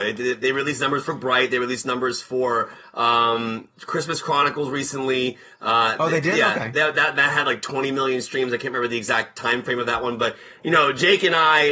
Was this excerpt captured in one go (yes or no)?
yes